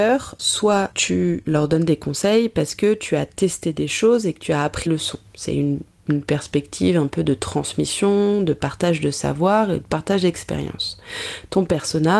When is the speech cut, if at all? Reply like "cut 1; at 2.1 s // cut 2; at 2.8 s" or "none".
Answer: cut 1; at 4.9 s